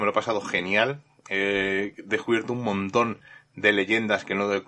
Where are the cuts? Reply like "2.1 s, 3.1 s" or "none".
none